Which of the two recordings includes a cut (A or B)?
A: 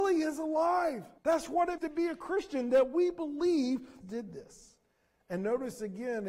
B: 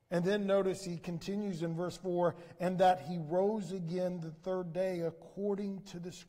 A